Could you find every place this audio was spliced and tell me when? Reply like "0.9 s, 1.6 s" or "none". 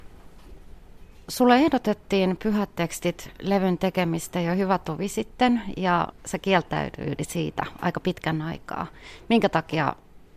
6.1 s

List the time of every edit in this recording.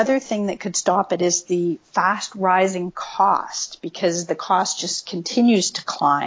none

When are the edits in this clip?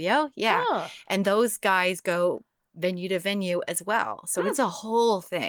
none

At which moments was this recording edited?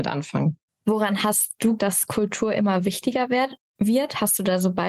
1.8 s

